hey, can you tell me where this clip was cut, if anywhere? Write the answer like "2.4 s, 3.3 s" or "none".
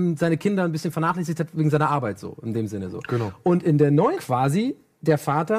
4.1 s